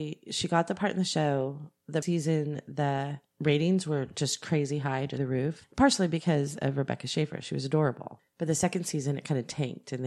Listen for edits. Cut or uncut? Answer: cut